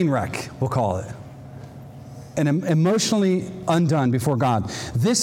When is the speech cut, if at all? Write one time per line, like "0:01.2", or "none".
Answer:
none